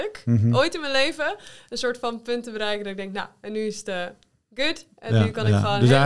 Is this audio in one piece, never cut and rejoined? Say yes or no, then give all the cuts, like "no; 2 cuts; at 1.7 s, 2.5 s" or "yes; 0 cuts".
yes; 0 cuts